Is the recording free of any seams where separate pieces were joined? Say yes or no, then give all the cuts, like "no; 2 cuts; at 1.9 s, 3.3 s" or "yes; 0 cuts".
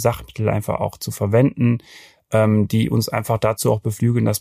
yes; 0 cuts